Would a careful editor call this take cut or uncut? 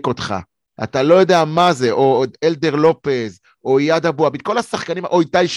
uncut